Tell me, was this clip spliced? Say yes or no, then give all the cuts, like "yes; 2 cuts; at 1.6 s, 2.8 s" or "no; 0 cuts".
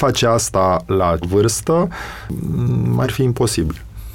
yes; 2 cuts; at 1.2 s, 3.0 s